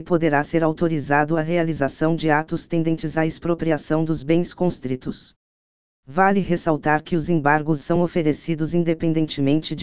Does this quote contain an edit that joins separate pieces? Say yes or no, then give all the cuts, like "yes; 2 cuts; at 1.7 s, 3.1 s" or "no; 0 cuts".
no; 0 cuts